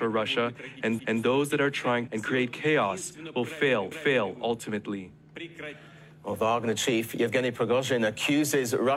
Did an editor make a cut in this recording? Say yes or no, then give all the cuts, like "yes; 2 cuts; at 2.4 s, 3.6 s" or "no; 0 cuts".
yes; 3 cuts; at 1.0 s, 2.1 s, 3.9 s